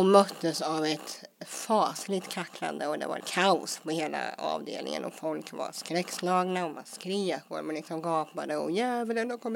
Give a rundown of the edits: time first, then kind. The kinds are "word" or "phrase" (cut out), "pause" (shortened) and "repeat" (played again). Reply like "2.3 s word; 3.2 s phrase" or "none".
3.2 s word